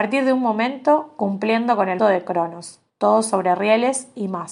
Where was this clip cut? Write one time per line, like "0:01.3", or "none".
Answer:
0:02.0
0:02.9